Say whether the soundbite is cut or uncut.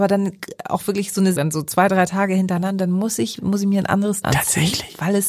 cut